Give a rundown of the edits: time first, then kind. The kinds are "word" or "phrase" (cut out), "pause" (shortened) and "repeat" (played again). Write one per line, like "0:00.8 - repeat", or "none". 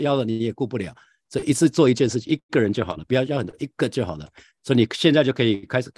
none

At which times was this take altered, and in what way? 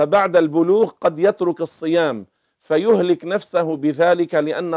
none

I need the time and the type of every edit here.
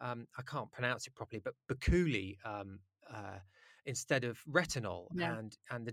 none

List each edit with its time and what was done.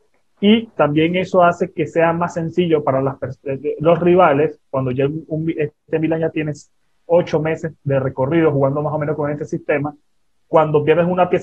none

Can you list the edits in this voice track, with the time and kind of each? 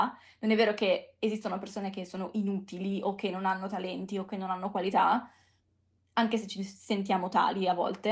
none

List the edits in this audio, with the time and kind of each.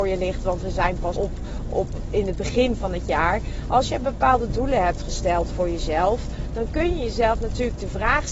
0:01.2 - word

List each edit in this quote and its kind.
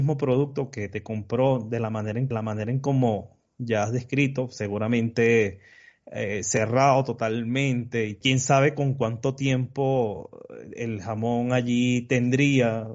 0:02.3 - repeat

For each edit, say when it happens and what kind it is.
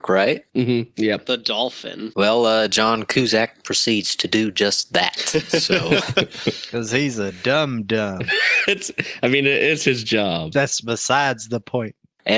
none

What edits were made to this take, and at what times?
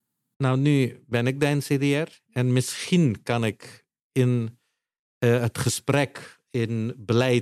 none

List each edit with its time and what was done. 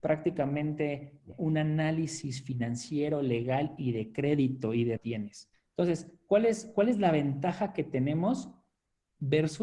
0:01.3 - word
0:05.0 - phrase

